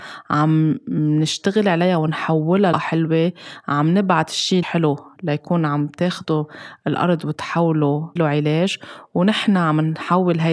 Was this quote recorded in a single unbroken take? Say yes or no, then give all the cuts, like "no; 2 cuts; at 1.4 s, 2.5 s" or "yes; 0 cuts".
no; 3 cuts; at 2.7 s, 4.6 s, 8.2 s